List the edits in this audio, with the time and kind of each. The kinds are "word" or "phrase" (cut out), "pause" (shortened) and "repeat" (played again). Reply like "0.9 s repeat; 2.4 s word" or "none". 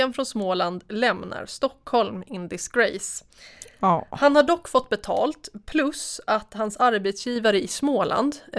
none